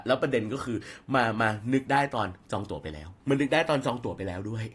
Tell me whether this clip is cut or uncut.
cut